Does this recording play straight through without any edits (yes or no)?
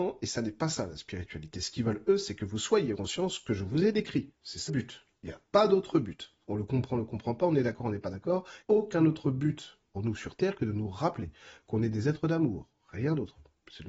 no